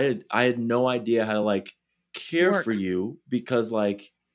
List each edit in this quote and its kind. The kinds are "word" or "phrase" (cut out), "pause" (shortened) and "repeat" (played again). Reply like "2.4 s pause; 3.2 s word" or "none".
none